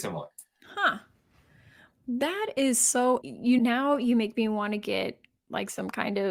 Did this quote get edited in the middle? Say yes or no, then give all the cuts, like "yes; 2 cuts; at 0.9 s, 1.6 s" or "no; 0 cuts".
yes; 1 cut; at 3.2 s